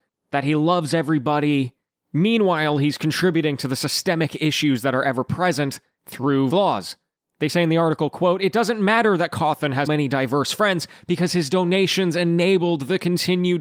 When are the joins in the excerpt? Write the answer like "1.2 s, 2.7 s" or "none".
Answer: 6.5 s, 9.9 s